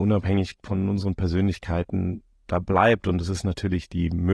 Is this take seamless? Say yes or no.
yes